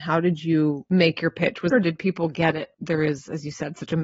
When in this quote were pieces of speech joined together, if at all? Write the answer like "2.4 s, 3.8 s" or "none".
1.7 s, 2.7 s